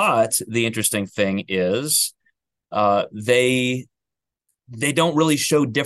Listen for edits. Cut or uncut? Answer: uncut